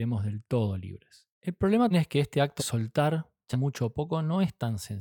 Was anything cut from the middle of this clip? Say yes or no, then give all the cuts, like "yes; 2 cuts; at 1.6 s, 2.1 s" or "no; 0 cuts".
yes; 4 cuts; at 1.3 s, 1.9 s, 2.6 s, 3.5 s